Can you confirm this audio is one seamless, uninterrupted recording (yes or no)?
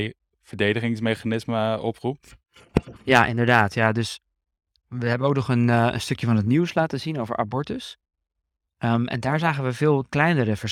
yes